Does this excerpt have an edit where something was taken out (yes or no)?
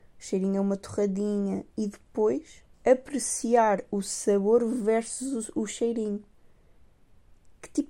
yes